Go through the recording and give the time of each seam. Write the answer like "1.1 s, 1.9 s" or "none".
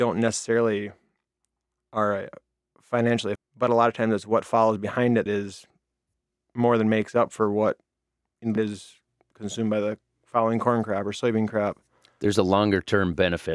3.4 s, 5.3 s, 8.6 s